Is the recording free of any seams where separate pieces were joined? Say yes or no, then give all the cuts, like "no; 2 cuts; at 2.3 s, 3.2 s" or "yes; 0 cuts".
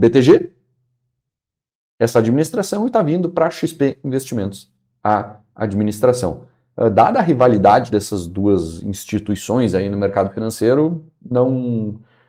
yes; 0 cuts